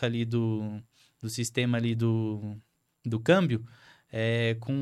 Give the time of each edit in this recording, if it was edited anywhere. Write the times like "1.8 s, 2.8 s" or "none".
none